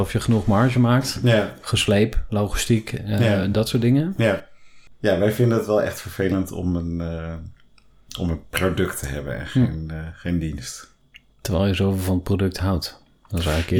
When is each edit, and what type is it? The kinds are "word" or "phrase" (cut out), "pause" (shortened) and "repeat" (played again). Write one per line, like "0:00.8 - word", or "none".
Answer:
none